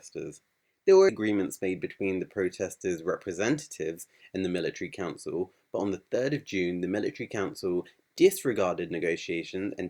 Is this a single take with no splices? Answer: no; 1 cut; at 1.1 s

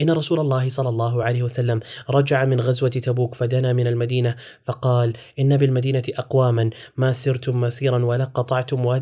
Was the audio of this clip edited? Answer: no; 0 cuts

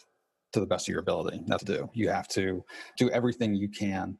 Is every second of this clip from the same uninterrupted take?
no; 2 cuts; at 1.6 s, 3.0 s

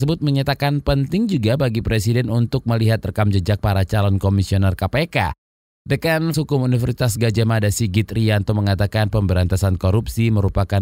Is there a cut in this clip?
yes; 1 cut; at 6.3 s

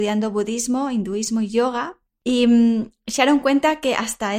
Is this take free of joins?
yes; 0 cuts

